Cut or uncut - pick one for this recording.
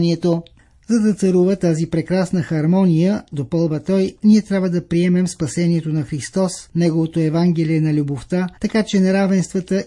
cut